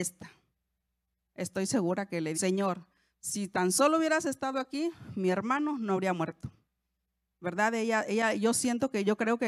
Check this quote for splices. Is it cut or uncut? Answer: cut